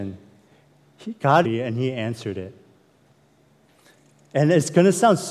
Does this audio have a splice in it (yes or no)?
yes